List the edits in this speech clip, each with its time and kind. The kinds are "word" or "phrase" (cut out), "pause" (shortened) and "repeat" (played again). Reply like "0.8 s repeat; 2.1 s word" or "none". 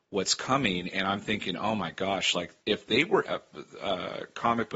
2.6 s pause; 3.2 s phrase